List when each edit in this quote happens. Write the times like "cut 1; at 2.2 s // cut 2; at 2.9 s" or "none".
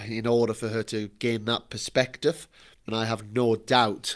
cut 1; at 2.9 s